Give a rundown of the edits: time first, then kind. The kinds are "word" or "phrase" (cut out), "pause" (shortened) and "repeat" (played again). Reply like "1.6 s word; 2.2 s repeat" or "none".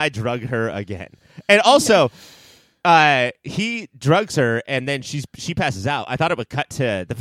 none

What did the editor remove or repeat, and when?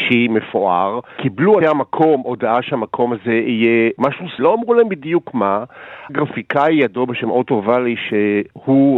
1.6 s word; 4.4 s word; 6.1 s word

